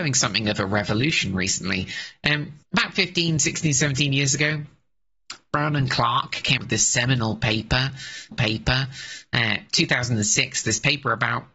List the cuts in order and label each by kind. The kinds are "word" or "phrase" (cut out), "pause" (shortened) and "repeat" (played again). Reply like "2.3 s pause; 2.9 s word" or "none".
2.6 s pause; 6.6 s word; 8.3 s repeat